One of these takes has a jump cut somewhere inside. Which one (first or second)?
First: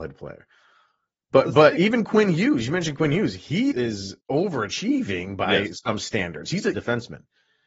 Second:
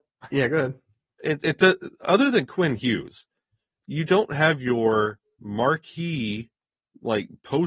first